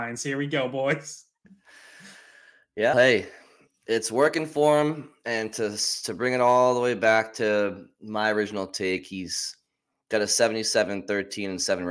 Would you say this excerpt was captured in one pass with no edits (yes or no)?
no